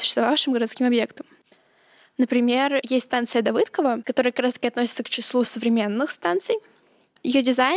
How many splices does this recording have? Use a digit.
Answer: 0